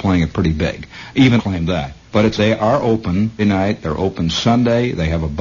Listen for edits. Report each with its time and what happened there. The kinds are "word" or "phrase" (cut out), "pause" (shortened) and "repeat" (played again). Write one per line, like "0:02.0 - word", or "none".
0:01.4 - phrase
0:02.1 - pause
0:02.4 - phrase
0:03.4 - word